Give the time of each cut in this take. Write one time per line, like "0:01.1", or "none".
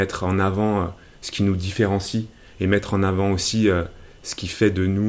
none